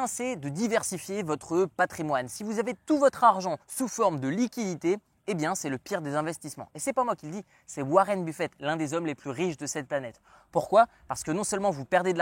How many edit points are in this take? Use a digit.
1